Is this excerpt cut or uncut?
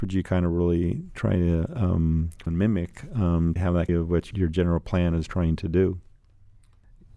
cut